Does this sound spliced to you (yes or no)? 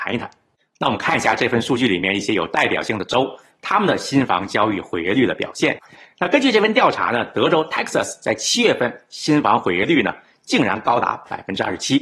no